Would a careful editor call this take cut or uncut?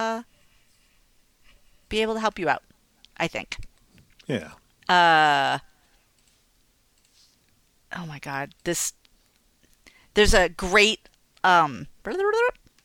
uncut